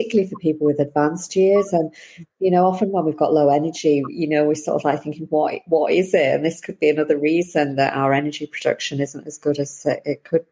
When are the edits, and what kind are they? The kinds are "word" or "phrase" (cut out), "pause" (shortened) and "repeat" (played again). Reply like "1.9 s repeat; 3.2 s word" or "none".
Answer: none